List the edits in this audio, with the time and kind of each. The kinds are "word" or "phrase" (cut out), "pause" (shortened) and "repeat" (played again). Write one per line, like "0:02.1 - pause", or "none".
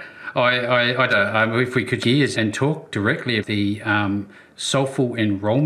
0:01.1 - phrase
0:02.0 - word
0:02.3 - word
0:03.4 - word